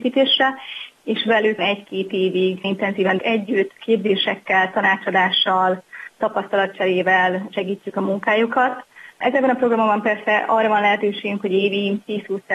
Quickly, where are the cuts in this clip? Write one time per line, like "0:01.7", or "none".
0:01.6
0:02.6
0:03.2